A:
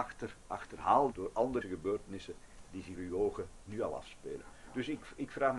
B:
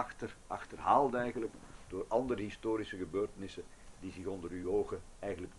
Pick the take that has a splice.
A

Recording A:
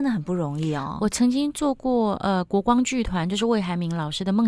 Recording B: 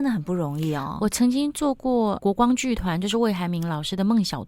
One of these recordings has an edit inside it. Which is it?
B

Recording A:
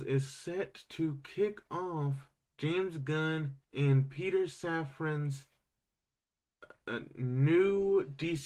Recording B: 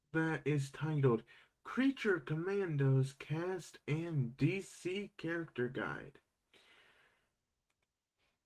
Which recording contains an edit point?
A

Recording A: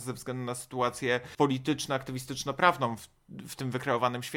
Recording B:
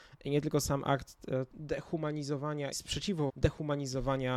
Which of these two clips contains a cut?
B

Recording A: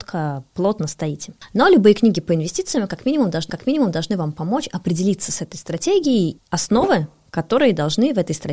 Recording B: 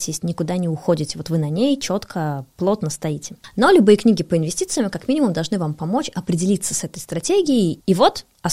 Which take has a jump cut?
A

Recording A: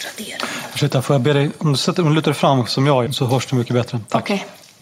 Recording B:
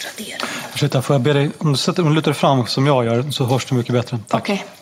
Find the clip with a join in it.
A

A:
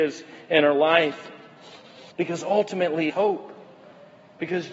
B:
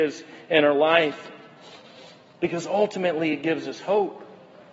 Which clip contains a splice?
A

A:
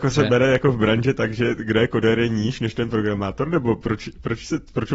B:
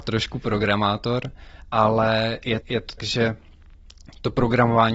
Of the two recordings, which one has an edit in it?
B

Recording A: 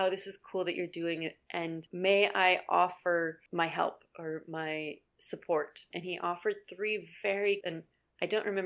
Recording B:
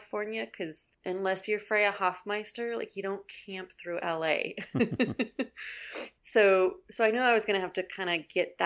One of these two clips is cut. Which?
A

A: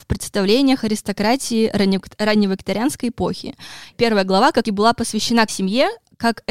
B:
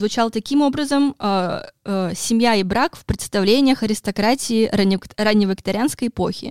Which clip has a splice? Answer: A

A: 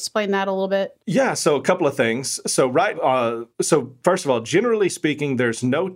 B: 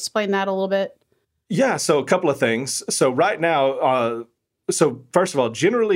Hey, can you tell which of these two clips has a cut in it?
A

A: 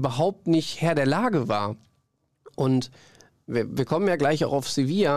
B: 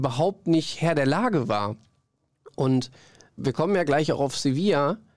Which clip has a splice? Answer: B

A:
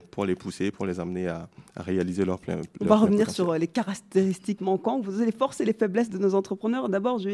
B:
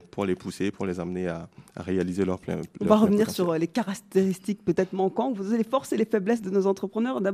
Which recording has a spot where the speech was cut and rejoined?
A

